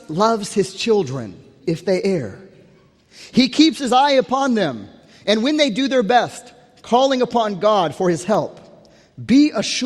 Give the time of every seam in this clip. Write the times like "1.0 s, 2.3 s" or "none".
1.6 s